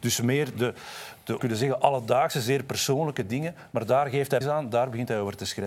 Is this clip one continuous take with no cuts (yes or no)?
no